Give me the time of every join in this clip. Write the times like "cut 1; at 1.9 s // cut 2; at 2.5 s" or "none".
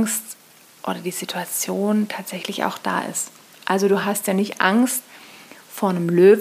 none